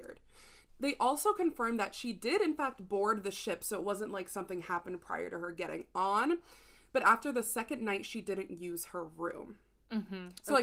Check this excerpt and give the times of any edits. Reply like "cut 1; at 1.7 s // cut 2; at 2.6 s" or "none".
none